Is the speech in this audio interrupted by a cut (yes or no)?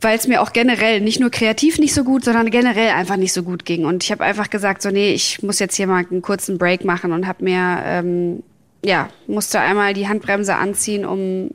no